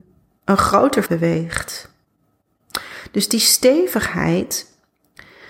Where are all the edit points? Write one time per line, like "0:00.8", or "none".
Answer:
0:01.1